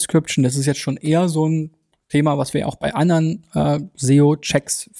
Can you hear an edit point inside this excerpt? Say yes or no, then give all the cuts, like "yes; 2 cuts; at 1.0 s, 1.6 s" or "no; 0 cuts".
no; 0 cuts